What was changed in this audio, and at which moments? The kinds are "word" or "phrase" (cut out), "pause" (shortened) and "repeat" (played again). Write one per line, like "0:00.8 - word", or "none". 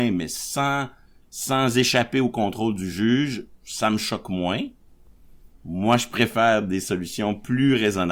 none